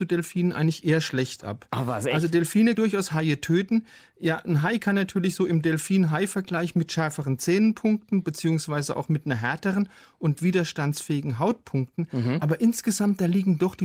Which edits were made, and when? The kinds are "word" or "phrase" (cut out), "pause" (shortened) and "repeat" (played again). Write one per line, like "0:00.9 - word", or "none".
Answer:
0:02.8 - word
0:04.4 - word
0:10.3 - word